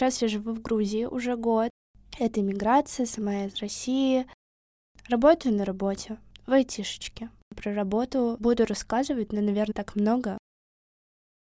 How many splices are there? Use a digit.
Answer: 1